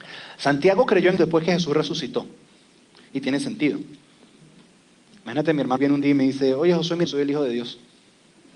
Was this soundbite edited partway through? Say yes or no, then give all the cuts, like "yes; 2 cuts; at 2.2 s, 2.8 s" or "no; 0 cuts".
yes; 3 cuts; at 1.2 s, 5.8 s, 7.0 s